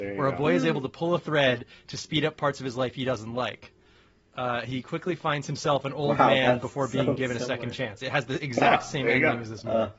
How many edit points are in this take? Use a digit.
0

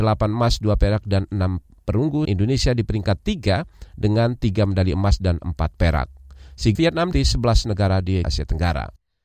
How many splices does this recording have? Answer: 4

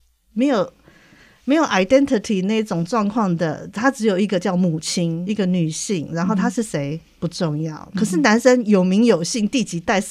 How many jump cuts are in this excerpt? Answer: 1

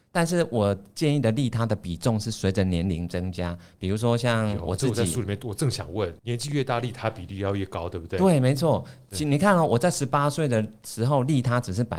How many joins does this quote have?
1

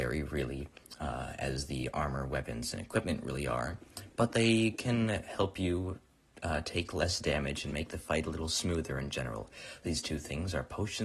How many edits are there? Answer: 0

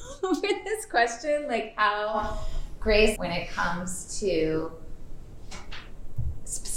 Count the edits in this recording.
1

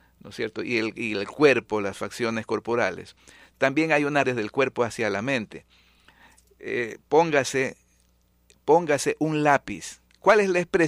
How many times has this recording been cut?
1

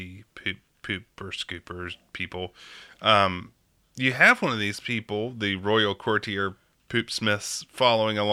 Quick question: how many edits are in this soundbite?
0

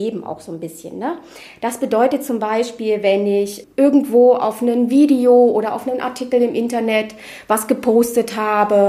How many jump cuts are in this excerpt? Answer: 0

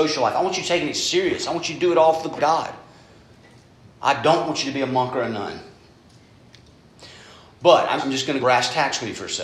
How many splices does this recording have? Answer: 3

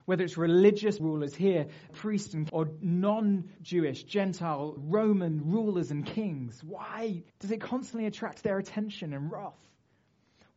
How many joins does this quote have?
6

